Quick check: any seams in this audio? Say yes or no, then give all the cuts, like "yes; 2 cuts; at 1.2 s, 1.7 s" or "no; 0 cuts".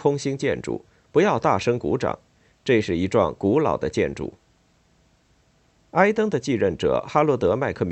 no; 0 cuts